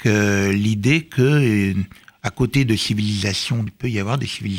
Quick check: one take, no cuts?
no; 1 cut; at 3.7 s

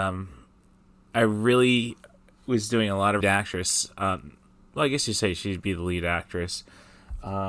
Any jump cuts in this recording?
yes; 1 cut; at 3.2 s

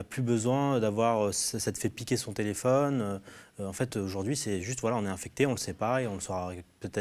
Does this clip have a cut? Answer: no; 0 cuts

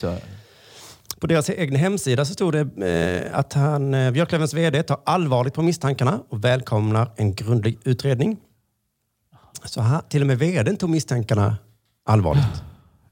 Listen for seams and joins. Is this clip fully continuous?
yes; 0 cuts

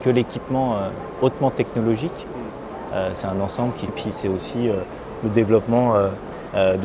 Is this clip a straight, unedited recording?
no; 1 cut; at 3.9 s

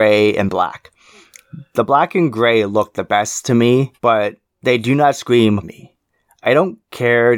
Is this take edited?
yes; 2 cuts; at 4.0 s, 5.6 s

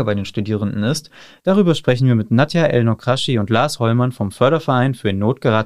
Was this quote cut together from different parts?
no; 0 cuts

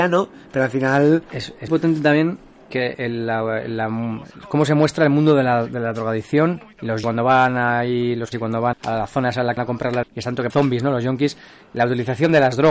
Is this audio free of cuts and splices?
no; 8 cuts; at 1.7 s, 2.9 s, 7.0 s, 8.3 s, 8.7 s, 9.6 s, 10.0 s, 10.5 s

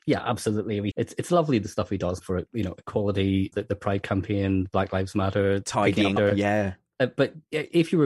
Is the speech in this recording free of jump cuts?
no; 4 cuts; at 0.9 s, 2.2 s, 3.5 s, 6.2 s

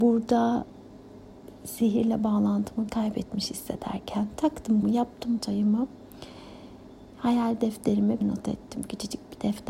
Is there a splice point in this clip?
yes; 4 cuts; at 2.9 s, 4.8 s, 5.4 s, 8.2 s

